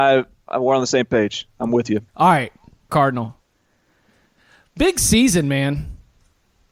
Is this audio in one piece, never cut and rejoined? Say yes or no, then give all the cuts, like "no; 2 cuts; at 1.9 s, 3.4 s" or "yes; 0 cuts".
no; 2 cuts; at 2.1 s, 2.9 s